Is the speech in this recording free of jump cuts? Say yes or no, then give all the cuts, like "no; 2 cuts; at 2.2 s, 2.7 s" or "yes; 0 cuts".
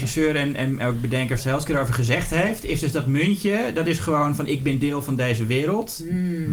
no; 1 cut; at 1.4 s